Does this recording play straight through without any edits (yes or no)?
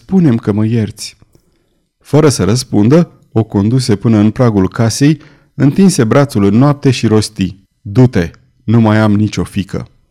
no